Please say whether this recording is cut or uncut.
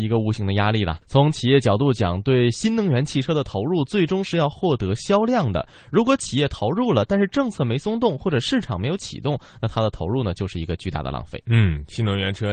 cut